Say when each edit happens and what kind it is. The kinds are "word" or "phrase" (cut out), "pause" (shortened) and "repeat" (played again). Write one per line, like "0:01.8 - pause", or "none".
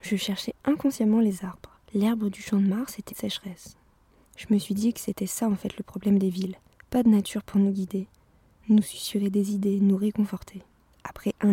0:01.8 - pause
0:03.1 - word
0:06.7 - pause

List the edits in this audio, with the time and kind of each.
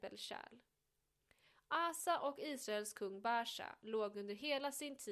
none

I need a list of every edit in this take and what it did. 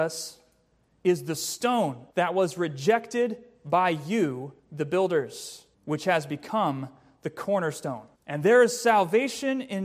0:02.1 - pause
0:04.6 - pause
0:05.7 - pause
0:08.1 - pause

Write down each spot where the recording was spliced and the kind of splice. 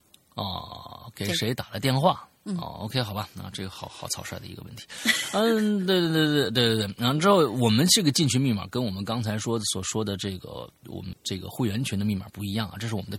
0:11.1 - word

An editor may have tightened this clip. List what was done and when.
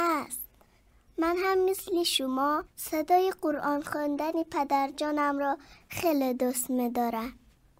none

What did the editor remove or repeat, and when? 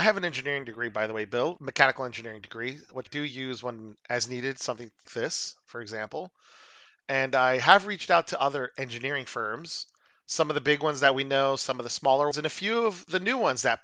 0:03.1 - word
0:05.1 - word
0:12.3 - word

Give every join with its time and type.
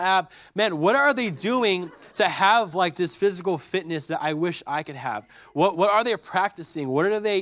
0:02.1 - pause

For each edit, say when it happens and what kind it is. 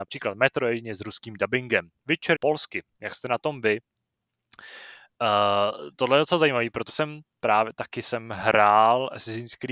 0:02.3 - word
0:06.9 - word

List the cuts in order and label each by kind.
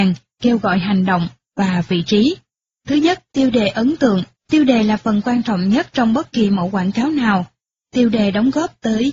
0:04.4 - pause

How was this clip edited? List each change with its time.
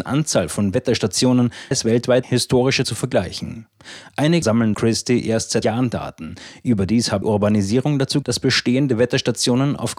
0:01.7 - word
0:02.2 - word
0:02.8 - word
0:04.4 - word
0:04.7 - word
0:05.6 - word
0:07.2 - word
0:08.2 - word

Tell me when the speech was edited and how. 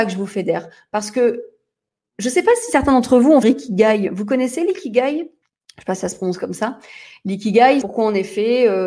0:03.4 - phrase
0:05.4 - pause
0:07.8 - word

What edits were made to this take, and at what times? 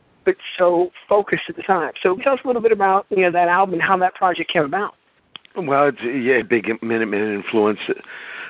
0:01.6 - word
0:02.2 - word
0:06.4 - word

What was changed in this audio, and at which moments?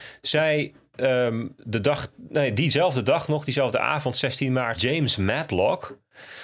0:04.8 - word

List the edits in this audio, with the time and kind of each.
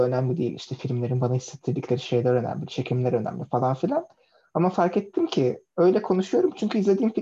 none

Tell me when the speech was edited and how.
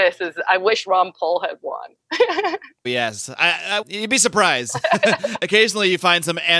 0:02.8 - word
0:03.8 - word

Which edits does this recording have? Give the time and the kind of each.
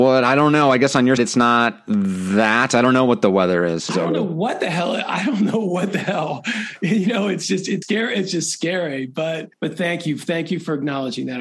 0:01.2 - word
0:07.8 - word
0:09.5 - pause

